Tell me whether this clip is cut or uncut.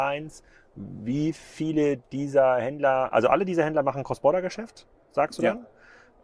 uncut